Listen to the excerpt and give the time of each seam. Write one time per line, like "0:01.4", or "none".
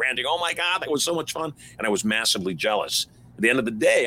none